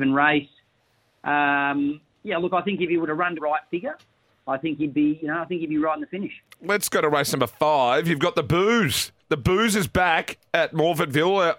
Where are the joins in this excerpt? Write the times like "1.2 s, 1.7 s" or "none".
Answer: 3.4 s